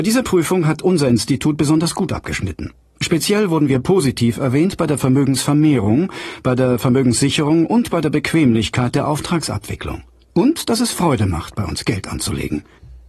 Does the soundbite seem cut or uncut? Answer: uncut